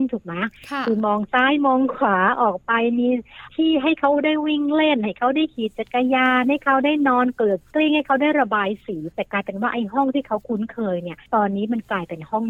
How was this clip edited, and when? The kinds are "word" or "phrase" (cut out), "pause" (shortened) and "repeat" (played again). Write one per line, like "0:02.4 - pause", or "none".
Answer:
0:11.3 - pause